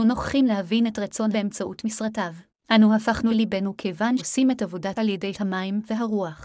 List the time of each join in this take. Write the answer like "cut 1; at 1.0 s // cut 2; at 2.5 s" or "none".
cut 1; at 1.3 s // cut 2; at 2.5 s // cut 3; at 3.3 s // cut 4; at 4.2 s // cut 5; at 4.9 s // cut 6; at 5.3 s